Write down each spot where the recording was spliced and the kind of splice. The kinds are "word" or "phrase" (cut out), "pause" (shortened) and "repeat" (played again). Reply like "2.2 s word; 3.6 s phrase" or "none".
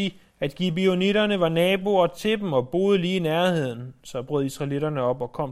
none

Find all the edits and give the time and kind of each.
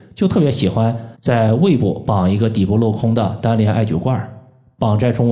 1.1 s pause

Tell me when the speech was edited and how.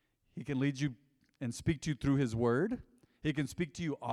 none

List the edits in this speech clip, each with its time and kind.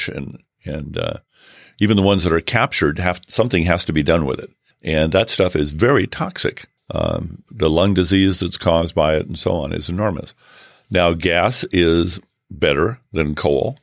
4.7 s pause; 6.8 s pause

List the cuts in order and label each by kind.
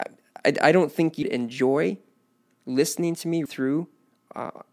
1.2 s word; 3.5 s word

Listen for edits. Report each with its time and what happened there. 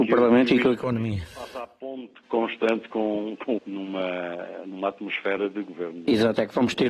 2.2 s word; 3.6 s phrase

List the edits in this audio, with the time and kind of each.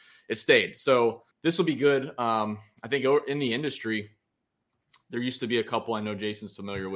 1.3 s pause

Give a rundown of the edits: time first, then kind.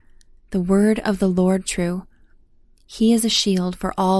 1.7 s word

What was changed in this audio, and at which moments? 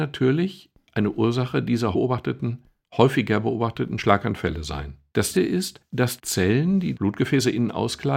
1.9 s word; 5.3 s word; 6.2 s word; 6.9 s word

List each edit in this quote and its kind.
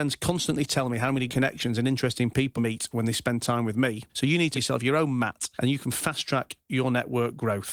1.3 s word; 2.6 s word; 4.5 s word

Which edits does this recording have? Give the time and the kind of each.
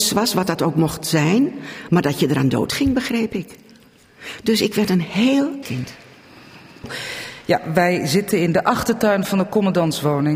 5.6 s word

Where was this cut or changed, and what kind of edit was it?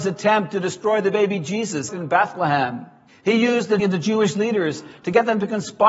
1.9 s phrase; 3.1 s pause; 3.8 s word

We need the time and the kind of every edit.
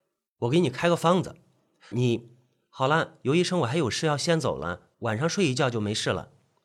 1.9 s word; 4.9 s pause

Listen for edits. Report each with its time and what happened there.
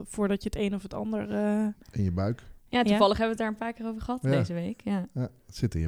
none

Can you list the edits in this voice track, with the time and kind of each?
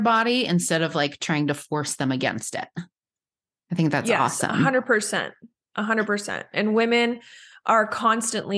none

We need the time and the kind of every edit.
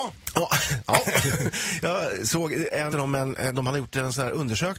2.9 s phrase

